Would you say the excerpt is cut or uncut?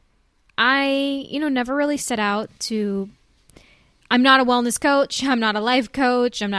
uncut